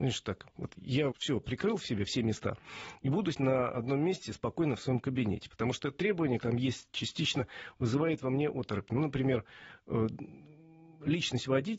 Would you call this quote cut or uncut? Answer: cut